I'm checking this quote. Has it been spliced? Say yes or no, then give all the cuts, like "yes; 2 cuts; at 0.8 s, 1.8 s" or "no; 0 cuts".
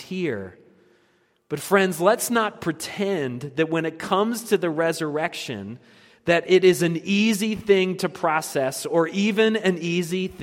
no; 0 cuts